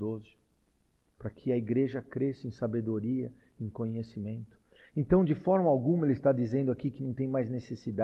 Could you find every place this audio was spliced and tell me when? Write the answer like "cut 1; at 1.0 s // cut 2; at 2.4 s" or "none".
none